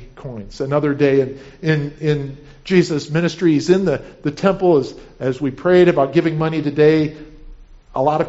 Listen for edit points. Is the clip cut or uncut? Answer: uncut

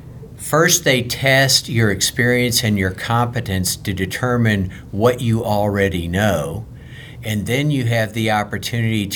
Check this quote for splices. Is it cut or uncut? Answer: uncut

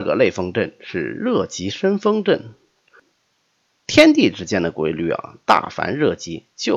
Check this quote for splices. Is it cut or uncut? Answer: uncut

